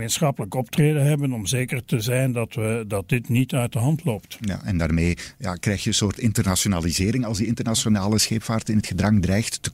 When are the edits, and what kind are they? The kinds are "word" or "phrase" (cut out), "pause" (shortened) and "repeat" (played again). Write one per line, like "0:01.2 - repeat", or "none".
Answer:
none